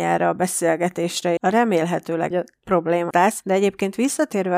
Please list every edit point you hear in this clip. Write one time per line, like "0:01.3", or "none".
0:01.4
0:02.3
0:03.1

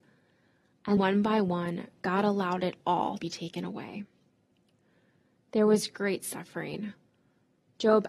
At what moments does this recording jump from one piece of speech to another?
0:01.0
0:03.2

